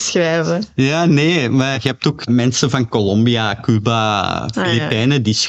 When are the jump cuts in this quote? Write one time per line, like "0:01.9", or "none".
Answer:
0:01.7
0:02.3